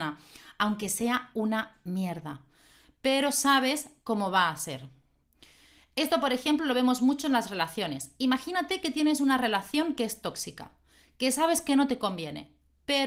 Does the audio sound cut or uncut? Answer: uncut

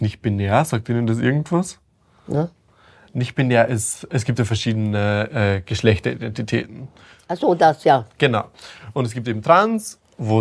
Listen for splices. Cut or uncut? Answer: uncut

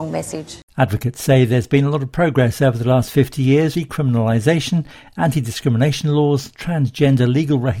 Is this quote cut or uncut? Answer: cut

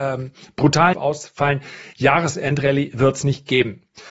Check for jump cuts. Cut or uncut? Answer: cut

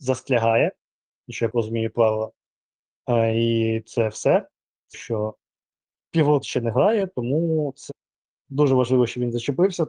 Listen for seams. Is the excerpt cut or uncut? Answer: cut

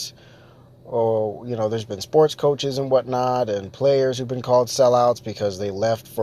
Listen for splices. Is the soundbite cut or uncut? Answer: uncut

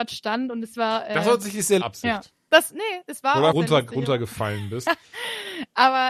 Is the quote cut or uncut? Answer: cut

